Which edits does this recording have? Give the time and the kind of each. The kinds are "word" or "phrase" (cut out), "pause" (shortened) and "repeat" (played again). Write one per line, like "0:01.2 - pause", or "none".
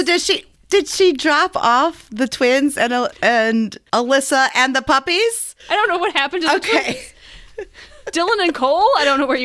0:03.9 - pause
0:05.6 - pause